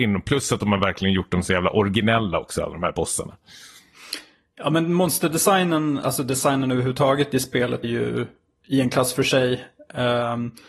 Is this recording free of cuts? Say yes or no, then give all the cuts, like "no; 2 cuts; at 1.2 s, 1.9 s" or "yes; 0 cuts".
no; 1 cut; at 7.8 s